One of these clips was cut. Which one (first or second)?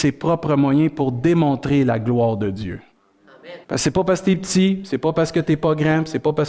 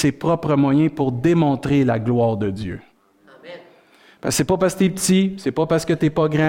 first